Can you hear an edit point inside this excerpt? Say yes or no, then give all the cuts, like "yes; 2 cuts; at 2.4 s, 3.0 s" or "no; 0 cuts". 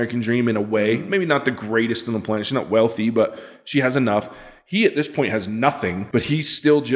no; 0 cuts